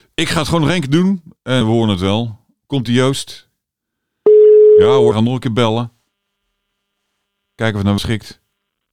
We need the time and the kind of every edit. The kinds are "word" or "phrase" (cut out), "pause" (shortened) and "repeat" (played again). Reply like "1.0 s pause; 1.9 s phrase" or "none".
1.6 s word; 5.1 s word; 8.0 s word